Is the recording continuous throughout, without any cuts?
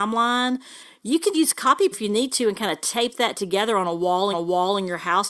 no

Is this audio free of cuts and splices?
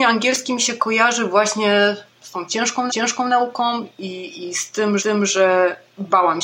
no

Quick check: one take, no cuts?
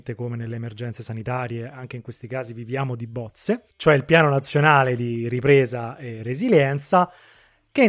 no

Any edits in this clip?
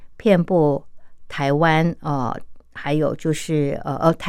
no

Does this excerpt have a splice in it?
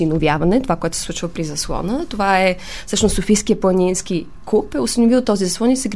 no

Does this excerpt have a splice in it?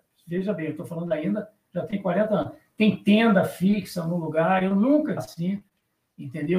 yes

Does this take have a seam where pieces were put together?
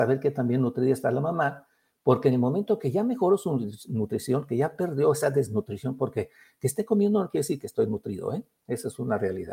no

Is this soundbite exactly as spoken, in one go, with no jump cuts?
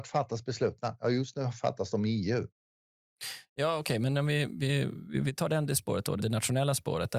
no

